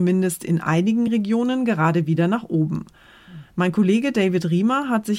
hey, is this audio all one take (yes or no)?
yes